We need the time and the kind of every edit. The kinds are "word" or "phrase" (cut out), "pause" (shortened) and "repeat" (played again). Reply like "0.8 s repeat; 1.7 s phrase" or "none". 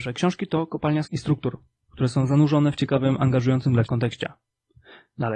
1.1 s word; 3.9 s word